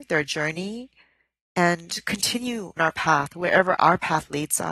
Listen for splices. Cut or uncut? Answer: cut